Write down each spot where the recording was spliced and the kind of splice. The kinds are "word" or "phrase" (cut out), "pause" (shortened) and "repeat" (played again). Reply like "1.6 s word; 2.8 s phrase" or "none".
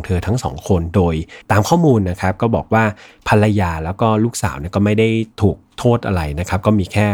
1.4 s pause